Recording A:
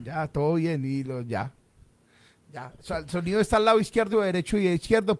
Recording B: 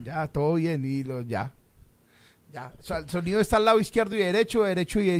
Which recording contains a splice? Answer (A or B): A